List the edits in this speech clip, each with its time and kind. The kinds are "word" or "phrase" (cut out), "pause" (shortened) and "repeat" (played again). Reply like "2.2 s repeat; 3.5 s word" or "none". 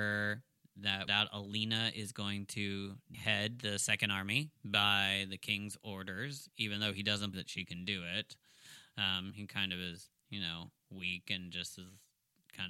1.1 s phrase; 3.1 s word; 4.6 s pause; 7.3 s word

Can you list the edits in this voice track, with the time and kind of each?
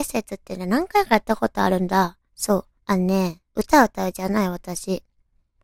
2.3 s pause; 2.7 s pause; 3.5 s pause

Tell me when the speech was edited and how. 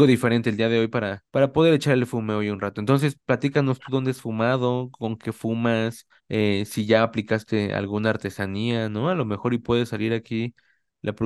1.3 s pause; 6.2 s pause

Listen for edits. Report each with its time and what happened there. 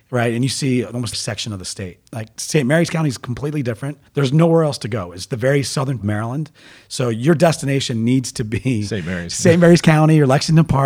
1.1 s phrase; 2.1 s pause; 4.1 s pause; 6.0 s phrase

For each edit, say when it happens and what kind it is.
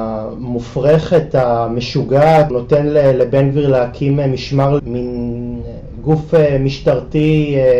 2.5 s word; 4.8 s word

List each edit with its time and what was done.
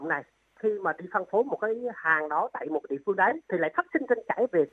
3.4 s pause

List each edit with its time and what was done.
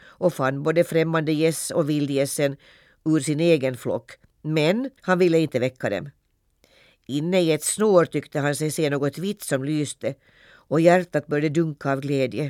5.0 s pause

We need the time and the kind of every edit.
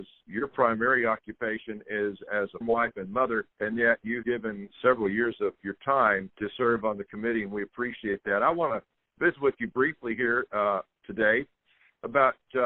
2.6 s word; 3.5 s pause; 4.2 s word; 6.3 s pause

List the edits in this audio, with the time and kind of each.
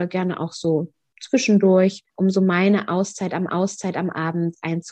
2.1 s pause; 3.5 s repeat

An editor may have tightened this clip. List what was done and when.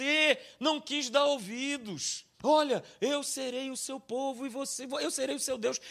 2.3 s pause

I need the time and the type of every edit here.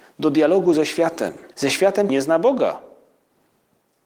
1.5 s pause; 2.1 s word

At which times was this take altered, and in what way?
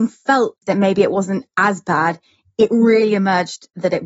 none

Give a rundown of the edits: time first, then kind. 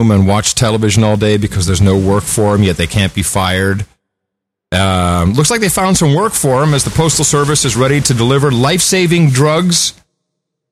none

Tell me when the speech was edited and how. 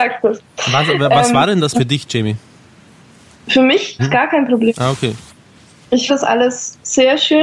1.7 s word; 4.0 s word; 6.1 s word

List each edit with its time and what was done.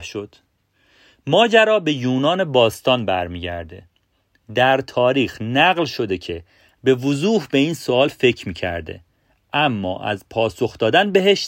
6.8 s word

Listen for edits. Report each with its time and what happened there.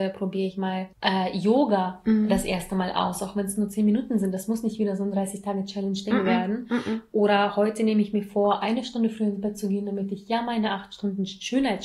0.9 s pause

